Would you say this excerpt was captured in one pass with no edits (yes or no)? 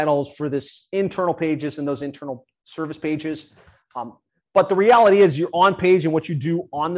yes